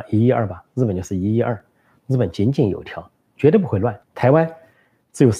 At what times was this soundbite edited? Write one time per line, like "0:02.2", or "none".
0:04.0